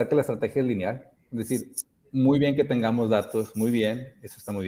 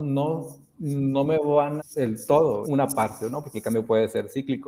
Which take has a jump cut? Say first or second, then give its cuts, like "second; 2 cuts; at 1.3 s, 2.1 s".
second; 2 cuts; at 1.8 s, 2.6 s